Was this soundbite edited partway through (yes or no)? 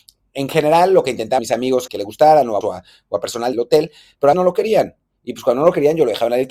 yes